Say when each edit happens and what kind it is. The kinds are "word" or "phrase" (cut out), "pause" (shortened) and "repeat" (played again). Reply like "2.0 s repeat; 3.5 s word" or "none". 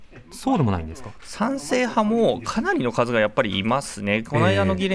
none